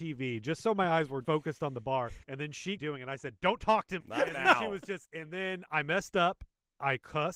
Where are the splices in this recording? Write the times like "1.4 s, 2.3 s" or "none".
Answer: 1.2 s, 2.2 s, 2.8 s, 4.0 s, 5.1 s